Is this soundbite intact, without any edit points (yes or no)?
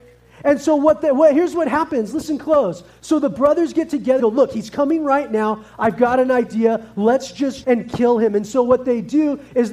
no